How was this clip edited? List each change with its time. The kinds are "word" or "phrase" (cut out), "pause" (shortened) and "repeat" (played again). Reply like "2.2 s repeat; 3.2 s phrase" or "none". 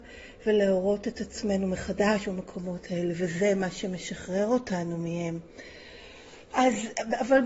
none